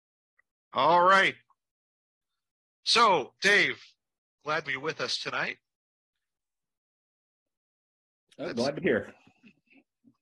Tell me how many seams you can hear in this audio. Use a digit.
3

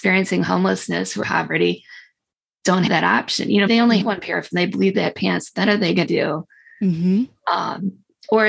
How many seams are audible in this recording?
8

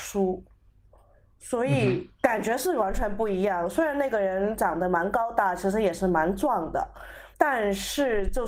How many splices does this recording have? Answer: 1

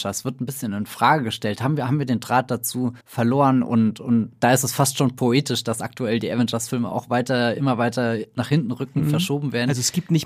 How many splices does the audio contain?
1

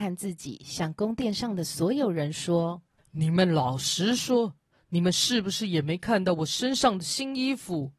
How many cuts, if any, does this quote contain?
0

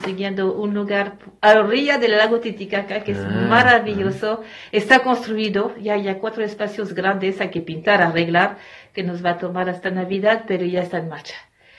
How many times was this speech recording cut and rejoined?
0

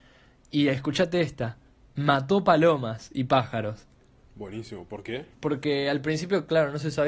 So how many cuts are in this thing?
2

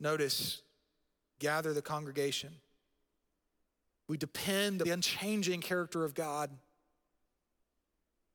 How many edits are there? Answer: 2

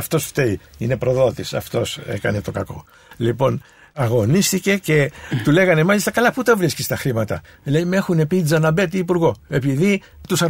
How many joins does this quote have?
1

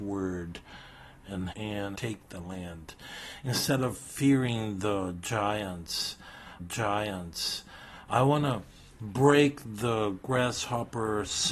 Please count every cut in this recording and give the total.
3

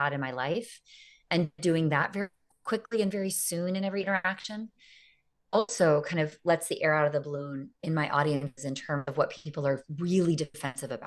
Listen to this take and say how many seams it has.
0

